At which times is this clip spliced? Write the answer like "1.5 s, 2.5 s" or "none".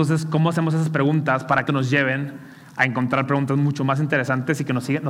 1.7 s